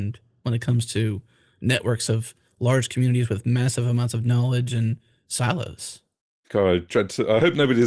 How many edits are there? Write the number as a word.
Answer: zero